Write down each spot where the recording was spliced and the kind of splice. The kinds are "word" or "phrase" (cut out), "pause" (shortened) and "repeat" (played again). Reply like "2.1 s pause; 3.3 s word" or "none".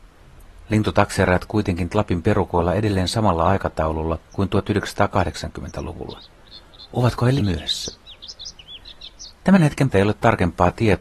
1.9 s word; 4.2 s pause; 7.4 s word; 9.9 s word